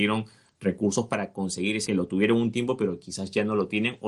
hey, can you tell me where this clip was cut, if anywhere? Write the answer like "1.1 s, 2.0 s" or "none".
1.9 s

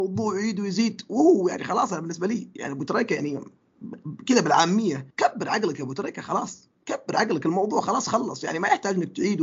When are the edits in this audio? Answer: 5.1 s

